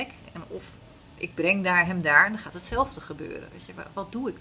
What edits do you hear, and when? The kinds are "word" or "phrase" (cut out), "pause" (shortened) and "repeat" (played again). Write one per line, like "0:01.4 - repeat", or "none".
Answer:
none